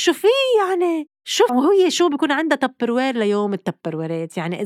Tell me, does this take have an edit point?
yes; 1 cut; at 1.5 s

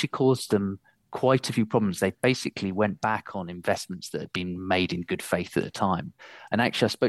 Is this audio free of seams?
yes; 0 cuts

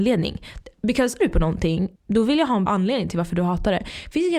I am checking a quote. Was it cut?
yes; 3 cuts; at 1.2 s, 2.0 s, 2.7 s

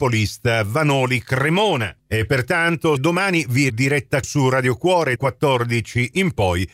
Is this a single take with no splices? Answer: no; 4 cuts; at 3.0 s, 3.7 s, 4.2 s, 5.2 s

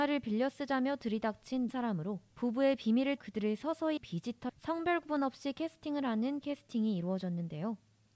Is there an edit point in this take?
yes; 6 cuts; at 1.7 s, 2.3 s, 3.2 s, 4.0 s, 4.5 s, 6.4 s

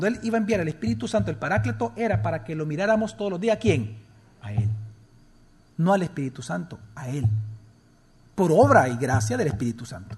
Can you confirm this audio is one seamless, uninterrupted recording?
yes; 0 cuts

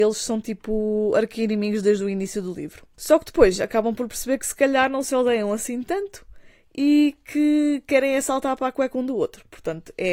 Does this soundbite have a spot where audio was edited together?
no; 0 cuts

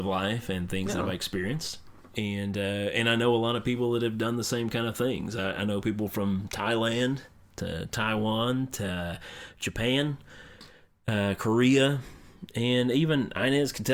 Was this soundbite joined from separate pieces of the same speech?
no; 0 cuts

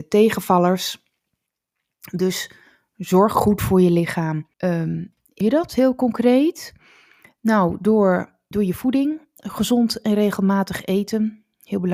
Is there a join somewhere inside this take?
yes; 3 cuts; at 4.5 s, 5.4 s, 8.5 s

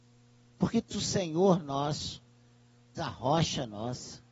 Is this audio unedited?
no; 2 cuts; at 0.9 s, 3.0 s

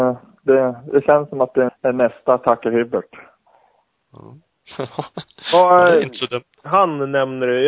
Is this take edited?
yes; 1 cut; at 1.7 s

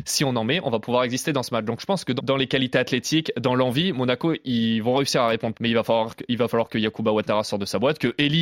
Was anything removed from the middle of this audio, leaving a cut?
yes; 2 cuts; at 2.2 s, 5.5 s

